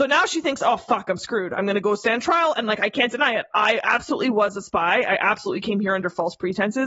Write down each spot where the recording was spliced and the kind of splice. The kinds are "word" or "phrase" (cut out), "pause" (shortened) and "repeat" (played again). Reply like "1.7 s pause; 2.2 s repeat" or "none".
none